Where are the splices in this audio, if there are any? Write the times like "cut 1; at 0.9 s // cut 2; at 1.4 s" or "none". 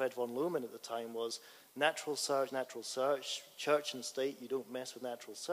cut 1; at 2.5 s

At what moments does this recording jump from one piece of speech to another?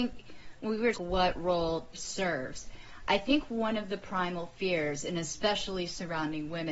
cut 1; at 0.9 s // cut 2; at 1.9 s

